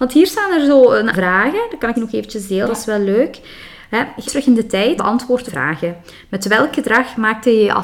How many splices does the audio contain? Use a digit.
6